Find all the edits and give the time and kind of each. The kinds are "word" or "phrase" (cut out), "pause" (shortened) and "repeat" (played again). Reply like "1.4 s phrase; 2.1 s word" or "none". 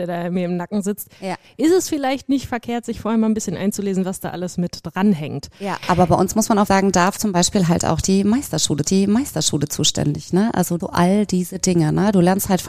6.7 s word; 7.2 s word; 8.8 s repeat; 10.8 s phrase